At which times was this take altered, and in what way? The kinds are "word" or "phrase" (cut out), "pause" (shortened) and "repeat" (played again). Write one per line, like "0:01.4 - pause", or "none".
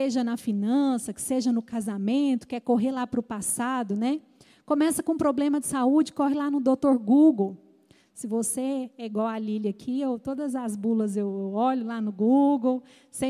none